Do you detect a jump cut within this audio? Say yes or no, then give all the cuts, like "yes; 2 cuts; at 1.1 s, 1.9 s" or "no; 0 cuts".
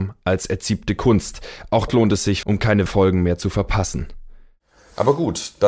yes; 3 cuts; at 1.9 s, 2.4 s, 2.9 s